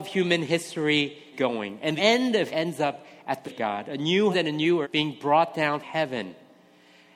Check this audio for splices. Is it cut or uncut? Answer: cut